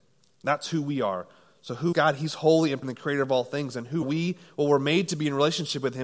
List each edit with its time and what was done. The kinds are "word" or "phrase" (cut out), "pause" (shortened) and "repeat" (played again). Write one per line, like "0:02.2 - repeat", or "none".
0:01.9 - word
0:02.8 - word
0:04.0 - word